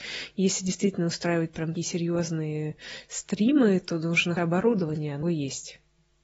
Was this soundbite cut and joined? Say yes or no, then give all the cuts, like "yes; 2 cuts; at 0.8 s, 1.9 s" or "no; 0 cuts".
yes; 3 cuts; at 1.8 s, 4.4 s, 5.2 s